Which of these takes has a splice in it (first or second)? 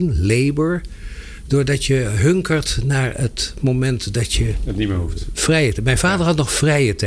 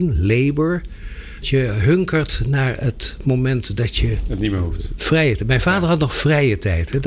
second